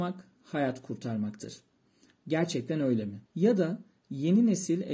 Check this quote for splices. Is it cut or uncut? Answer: cut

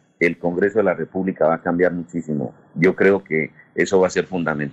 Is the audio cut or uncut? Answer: uncut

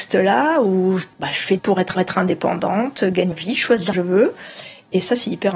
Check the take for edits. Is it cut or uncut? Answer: cut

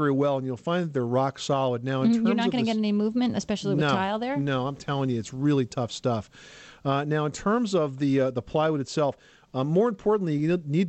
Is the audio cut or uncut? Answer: uncut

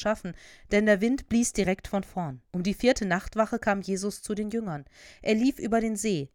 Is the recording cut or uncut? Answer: cut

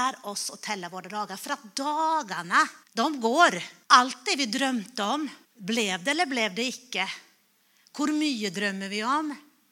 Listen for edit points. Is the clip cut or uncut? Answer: cut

